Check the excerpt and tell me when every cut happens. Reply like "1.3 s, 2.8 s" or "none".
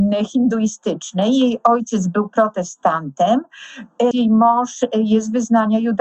4.1 s